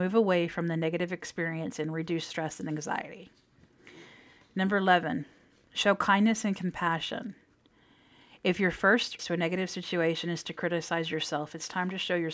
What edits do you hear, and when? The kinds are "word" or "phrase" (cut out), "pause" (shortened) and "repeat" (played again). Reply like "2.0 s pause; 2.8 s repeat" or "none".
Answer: 9.2 s word